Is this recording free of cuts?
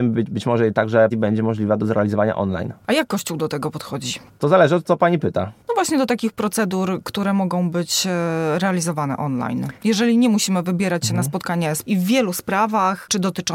no; 3 cuts; at 1.1 s, 9.8 s, 11.8 s

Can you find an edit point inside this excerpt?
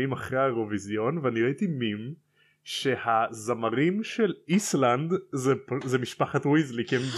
no; 0 cuts

